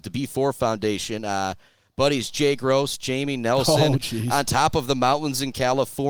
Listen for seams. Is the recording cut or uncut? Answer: uncut